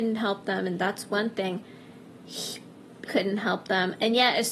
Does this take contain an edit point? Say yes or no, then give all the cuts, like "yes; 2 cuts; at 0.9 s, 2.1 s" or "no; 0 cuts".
yes; 1 cut; at 3.1 s